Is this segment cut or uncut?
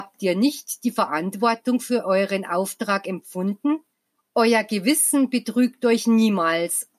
cut